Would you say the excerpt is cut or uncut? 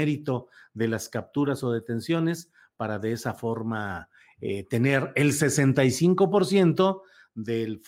uncut